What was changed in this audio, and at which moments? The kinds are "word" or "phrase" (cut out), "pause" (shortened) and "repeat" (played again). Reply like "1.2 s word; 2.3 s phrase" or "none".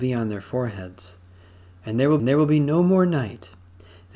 2.2 s repeat